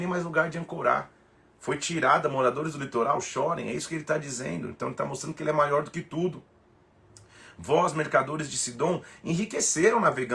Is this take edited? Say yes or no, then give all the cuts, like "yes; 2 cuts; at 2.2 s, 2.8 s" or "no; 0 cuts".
no; 0 cuts